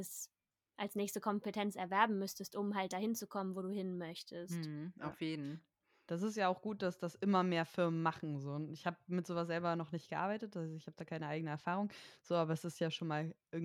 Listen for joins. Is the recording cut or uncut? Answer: uncut